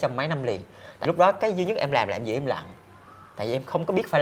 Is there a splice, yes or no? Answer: yes